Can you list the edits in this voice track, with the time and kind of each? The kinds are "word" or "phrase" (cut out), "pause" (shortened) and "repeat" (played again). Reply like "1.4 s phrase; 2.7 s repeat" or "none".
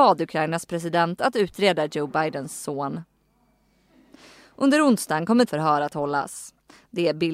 5.5 s word

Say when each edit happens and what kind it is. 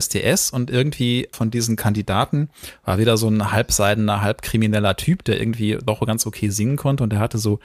1.3 s word

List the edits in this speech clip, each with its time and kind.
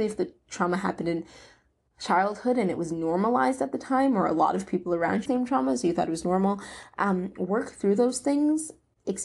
5.3 s phrase

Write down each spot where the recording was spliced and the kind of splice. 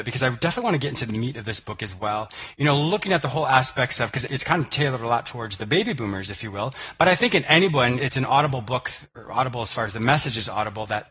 4.3 s word; 8.0 s word

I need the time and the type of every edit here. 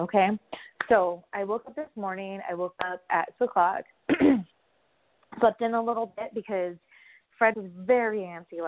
3.4 s word; 7.5 s word

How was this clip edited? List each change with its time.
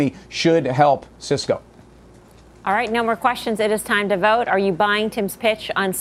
none

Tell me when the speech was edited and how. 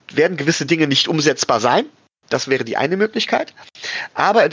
none

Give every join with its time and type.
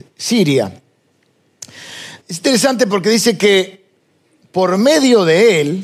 2.2 s pause; 4.0 s pause

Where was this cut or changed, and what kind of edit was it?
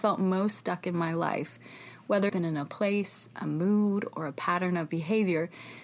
2.3 s word

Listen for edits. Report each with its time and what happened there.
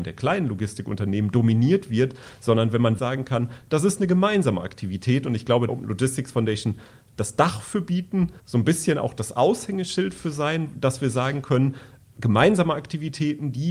3.0 s word; 5.7 s phrase; 8.4 s pause

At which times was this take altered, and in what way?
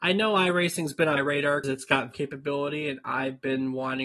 1.2 s word; 1.6 s word; 2.1 s word

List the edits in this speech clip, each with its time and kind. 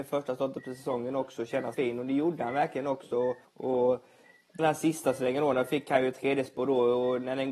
1.7 s phrase; 3.4 s pause; 4.6 s phrase

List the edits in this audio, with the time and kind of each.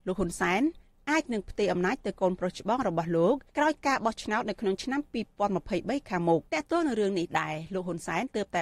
3.5 s pause; 6.5 s pause

